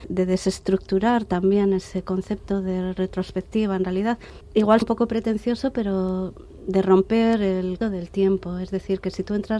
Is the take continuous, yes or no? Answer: no